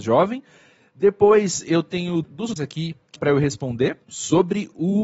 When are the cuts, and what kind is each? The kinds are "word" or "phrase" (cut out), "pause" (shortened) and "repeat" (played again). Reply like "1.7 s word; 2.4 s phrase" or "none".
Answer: 2.2 s word; 2.6 s phrase; 3.2 s word; 4.0 s pause

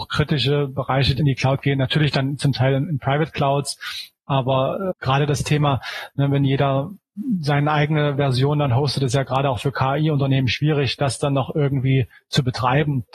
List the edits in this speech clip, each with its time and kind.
1.2 s phrase; 4.9 s word

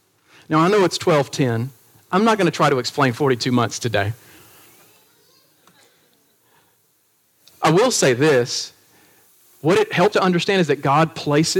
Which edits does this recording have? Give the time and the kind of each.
10.1 s word

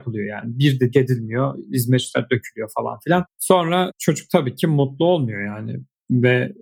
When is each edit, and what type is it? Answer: 0.9 s word

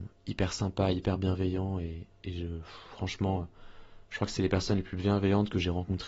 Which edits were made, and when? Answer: none

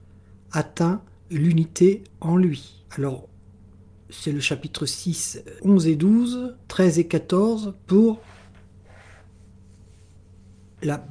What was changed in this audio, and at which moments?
2.1 s pause; 2.9 s pause; 5.6 s word; 6.6 s pause

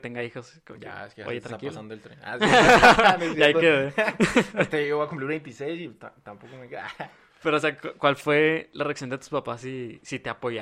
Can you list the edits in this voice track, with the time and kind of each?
none

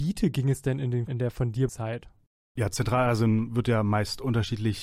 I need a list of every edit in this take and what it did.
1.1 s word; 1.7 s word

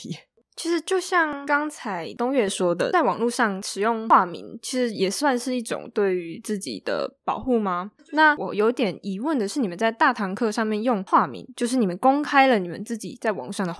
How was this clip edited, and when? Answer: 8.0 s pause

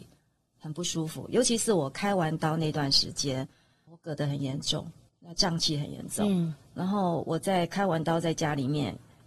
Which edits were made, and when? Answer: 3.9 s word; 5.1 s pause

